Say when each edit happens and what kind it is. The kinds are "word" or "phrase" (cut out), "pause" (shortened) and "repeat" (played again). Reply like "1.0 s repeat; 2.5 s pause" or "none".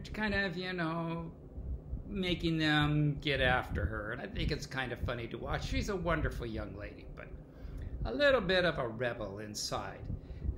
4.2 s word